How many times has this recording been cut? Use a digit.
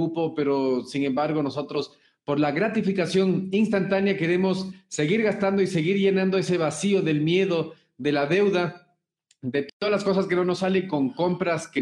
0